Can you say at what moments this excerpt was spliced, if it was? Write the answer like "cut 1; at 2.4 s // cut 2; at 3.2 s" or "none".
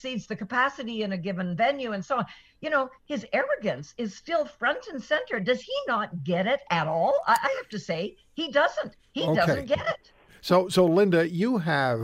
none